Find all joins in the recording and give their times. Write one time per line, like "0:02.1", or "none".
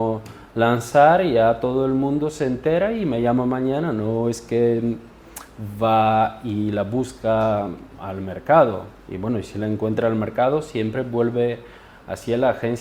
none